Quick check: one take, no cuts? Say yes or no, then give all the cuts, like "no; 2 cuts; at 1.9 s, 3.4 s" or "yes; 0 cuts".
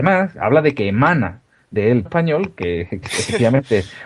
no; 2 cuts; at 2.0 s, 3.0 s